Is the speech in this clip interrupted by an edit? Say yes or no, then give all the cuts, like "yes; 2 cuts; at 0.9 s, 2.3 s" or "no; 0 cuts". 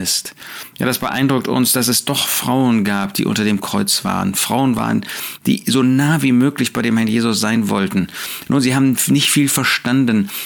no; 0 cuts